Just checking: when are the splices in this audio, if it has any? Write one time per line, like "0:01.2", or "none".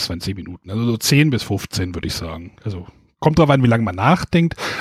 0:02.6